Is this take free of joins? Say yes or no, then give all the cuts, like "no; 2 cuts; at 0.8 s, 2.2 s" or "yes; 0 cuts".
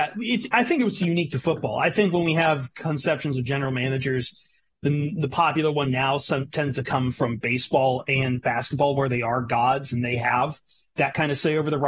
yes; 0 cuts